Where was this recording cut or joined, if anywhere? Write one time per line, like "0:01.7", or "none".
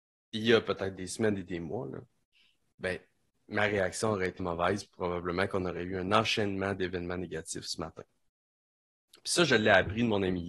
0:04.4